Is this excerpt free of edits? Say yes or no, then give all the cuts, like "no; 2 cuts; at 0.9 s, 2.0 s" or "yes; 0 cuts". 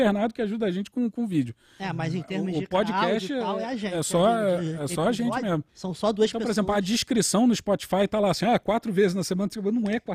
no; 1 cut; at 5.7 s